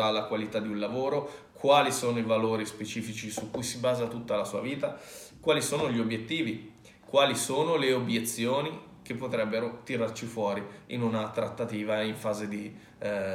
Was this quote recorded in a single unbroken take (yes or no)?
yes